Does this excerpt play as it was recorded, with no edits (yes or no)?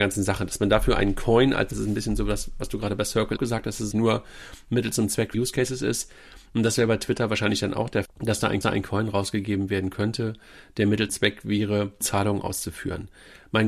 no